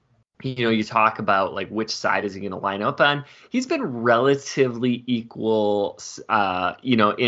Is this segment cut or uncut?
uncut